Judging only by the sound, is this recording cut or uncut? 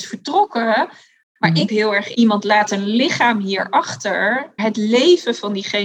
cut